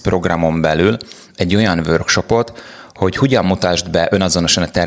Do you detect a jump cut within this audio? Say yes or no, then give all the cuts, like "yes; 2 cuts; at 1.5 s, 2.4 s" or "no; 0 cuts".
no; 0 cuts